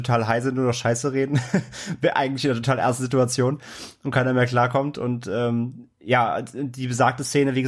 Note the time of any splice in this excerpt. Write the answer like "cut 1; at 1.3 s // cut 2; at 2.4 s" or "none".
cut 1; at 5.9 s